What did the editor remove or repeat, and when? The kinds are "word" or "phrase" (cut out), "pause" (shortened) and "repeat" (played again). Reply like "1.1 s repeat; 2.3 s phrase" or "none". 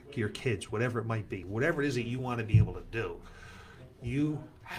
none